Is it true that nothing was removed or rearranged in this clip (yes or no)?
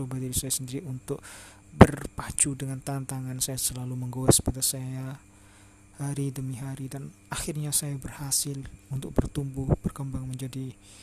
no